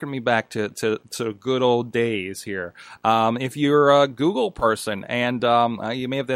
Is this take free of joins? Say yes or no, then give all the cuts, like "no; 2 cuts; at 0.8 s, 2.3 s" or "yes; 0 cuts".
yes; 0 cuts